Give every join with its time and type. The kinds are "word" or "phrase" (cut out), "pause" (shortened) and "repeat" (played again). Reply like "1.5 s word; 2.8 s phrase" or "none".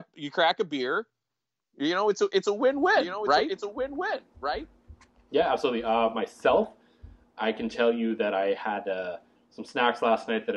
none